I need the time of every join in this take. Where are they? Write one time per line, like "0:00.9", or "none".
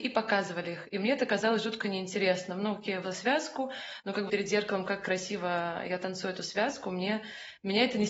0:03.0
0:04.3